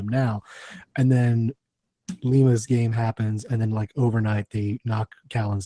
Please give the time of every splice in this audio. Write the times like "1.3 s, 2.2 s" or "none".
none